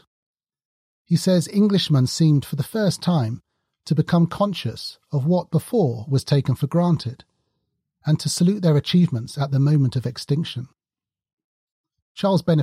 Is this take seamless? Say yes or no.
yes